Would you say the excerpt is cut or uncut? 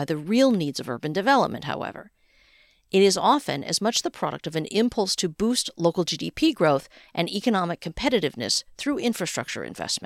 uncut